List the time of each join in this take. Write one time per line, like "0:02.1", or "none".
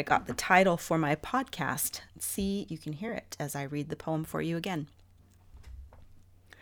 0:02.1
0:02.7